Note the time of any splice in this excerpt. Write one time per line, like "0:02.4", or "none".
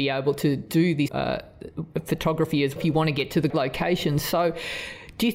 0:01.1
0:02.8
0:03.5